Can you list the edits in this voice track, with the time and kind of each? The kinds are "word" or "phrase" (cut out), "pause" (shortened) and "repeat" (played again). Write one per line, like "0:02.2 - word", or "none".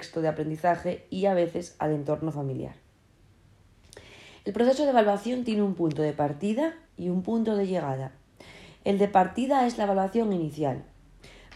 0:06.9 - pause